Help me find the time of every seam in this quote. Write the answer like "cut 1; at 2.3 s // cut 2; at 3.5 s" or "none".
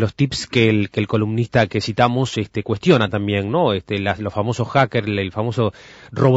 none